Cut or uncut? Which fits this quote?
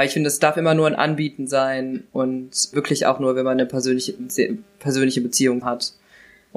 cut